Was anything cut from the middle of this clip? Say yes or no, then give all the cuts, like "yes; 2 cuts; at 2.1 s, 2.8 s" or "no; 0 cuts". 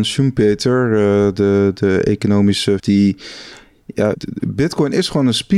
yes; 2 cuts; at 2.8 s, 4.1 s